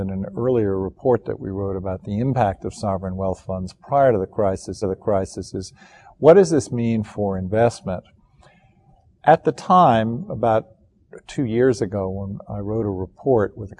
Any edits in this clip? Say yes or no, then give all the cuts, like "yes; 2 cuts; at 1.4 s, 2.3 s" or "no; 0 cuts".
yes; 1 cut; at 4.8 s